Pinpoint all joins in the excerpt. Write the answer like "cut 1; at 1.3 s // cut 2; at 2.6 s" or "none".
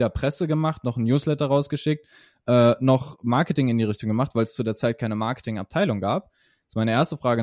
none